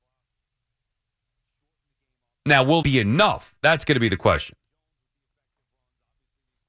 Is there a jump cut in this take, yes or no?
yes